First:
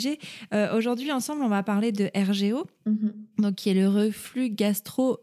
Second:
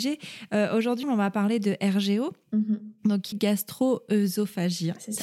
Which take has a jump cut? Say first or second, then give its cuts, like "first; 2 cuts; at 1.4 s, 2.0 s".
second; 2 cuts; at 1.0 s, 3.3 s